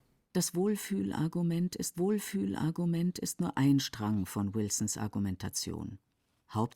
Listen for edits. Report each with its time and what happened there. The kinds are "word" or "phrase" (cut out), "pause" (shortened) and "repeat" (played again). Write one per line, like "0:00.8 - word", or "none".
0:01.9 - repeat